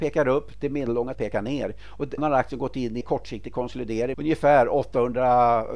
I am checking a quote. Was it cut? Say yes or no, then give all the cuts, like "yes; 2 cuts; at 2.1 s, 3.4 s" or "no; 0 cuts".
yes; 4 cuts; at 1.1 s, 2.2 s, 3.0 s, 4.1 s